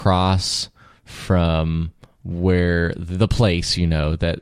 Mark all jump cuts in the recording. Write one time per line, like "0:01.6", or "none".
none